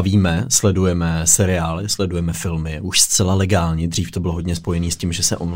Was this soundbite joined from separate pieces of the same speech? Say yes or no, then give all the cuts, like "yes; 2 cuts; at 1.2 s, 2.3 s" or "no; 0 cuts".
no; 0 cuts